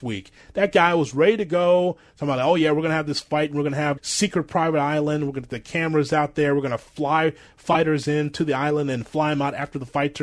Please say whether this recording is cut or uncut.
cut